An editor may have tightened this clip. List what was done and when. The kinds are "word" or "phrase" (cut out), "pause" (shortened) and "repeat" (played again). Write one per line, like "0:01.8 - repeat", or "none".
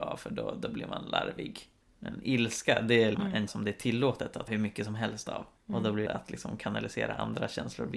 0:01.8 - pause
0:03.1 - word
0:03.5 - word
0:04.5 - word
0:05.6 - pause
0:06.1 - phrase